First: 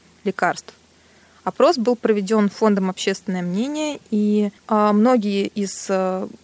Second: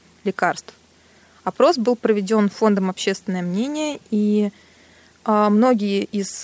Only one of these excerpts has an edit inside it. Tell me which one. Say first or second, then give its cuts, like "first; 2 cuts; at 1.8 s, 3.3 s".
first; 1 cut; at 4.6 s